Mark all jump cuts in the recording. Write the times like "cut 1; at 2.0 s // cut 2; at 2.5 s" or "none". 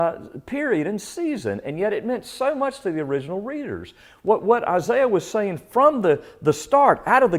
none